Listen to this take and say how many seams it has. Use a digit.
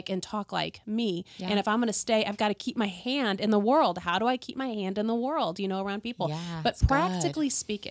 0